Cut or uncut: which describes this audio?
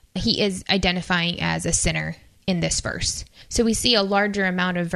uncut